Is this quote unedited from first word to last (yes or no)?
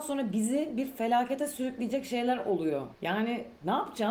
no